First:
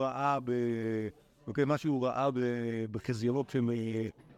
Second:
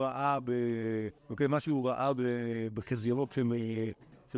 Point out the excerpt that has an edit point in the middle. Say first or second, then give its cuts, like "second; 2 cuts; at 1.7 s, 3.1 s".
second; 1 cut; at 1.2 s